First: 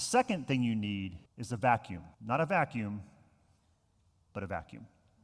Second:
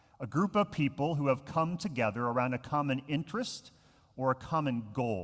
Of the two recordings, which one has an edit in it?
first; 2 cuts; at 1.3 s, 2.1 s

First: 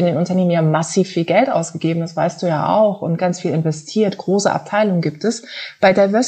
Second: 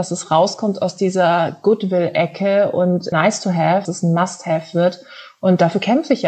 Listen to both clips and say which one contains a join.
second; 2 cuts; at 3.1 s, 3.8 s

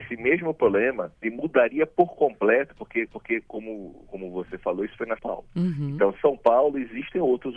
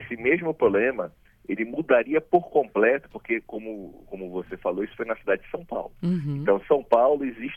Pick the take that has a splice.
first; 3 cuts; at 1.2 s, 3.1 s, 5.2 s

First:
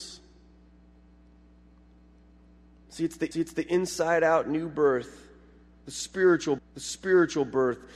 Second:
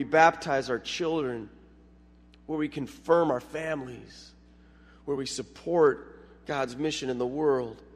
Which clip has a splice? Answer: first; 2 cuts; at 3.3 s, 6.6 s

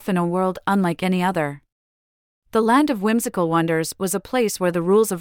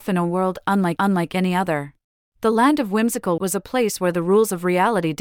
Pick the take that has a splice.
second; 3 cuts; at 1.0 s, 2.1 s, 3.4 s

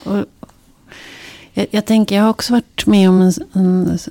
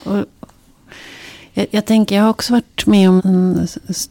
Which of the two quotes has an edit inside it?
second; 1 cut; at 3.2 s

